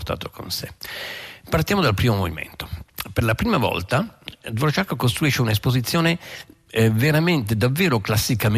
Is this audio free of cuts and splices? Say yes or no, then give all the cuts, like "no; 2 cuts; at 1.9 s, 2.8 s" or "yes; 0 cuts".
yes; 0 cuts